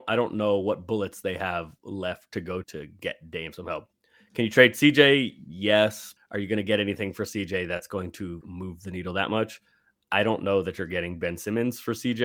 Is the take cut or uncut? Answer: cut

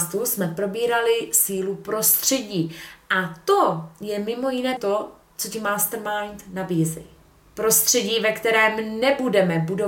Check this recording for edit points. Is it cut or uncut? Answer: cut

